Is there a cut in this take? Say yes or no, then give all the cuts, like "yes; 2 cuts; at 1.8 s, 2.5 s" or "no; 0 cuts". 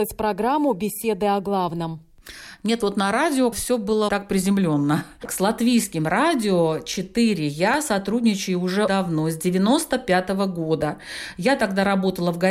yes; 3 cuts; at 3.5 s, 4.1 s, 8.9 s